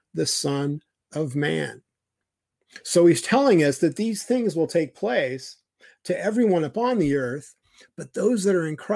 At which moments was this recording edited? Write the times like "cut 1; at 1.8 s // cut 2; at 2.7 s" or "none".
none

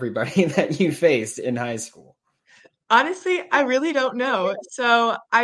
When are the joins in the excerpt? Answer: none

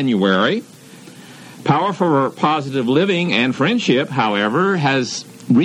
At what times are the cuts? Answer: none

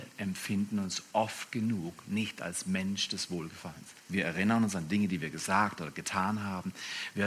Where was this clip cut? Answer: cut 1; at 4.0 s

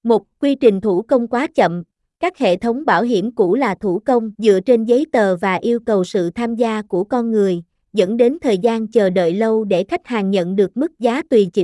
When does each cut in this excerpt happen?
cut 1; at 4.3 s

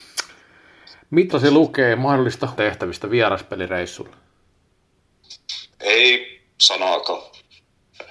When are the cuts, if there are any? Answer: cut 1; at 1.3 s // cut 2; at 2.6 s // cut 3; at 5.7 s

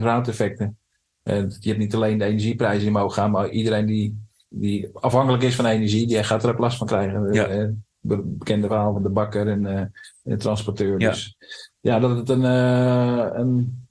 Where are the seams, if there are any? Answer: none

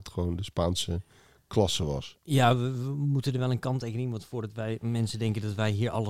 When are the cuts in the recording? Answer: none

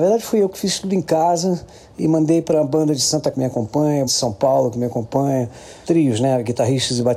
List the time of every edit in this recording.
cut 1; at 3.3 s // cut 2; at 4.1 s // cut 3; at 5.8 s

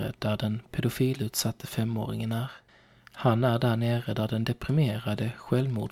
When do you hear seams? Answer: cut 1; at 2.7 s

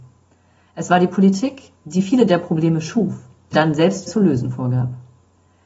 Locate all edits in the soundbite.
cut 1; at 3.5 s // cut 2; at 4.1 s

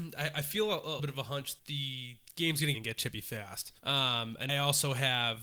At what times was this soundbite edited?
cut 1; at 1.0 s // cut 2; at 1.6 s // cut 3; at 2.7 s // cut 4; at 3.8 s // cut 5; at 4.5 s

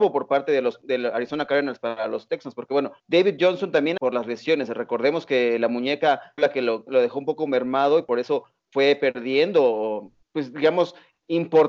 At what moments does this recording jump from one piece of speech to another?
cut 1; at 3.0 s // cut 2; at 4.0 s // cut 3; at 6.4 s // cut 4; at 6.9 s // cut 5; at 10.2 s

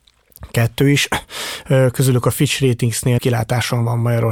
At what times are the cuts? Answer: cut 1; at 3.2 s

